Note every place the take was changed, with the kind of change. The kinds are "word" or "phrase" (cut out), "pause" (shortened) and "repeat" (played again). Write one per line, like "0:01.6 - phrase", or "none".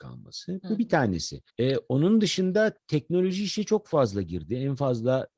0:01.5 - pause